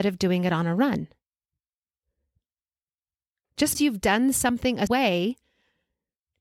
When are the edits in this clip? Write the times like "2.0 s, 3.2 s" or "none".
3.7 s, 4.9 s